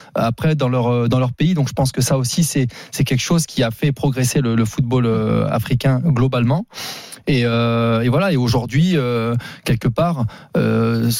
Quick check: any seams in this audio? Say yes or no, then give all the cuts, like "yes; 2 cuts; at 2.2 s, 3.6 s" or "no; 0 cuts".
no; 0 cuts